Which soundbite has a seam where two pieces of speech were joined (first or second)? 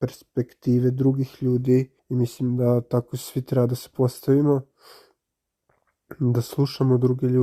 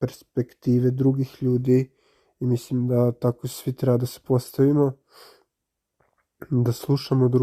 first